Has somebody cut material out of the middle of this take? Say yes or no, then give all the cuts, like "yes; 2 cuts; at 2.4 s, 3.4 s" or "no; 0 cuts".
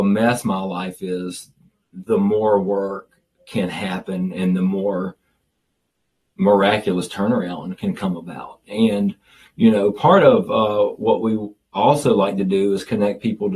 no; 0 cuts